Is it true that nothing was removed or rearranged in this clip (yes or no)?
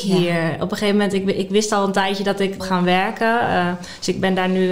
no